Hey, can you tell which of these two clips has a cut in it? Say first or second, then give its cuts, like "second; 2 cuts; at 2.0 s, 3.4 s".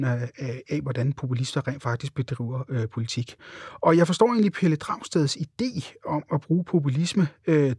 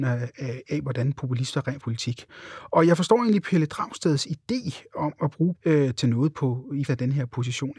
second; 3 cuts; at 1.8 s, 5.5 s, 6.9 s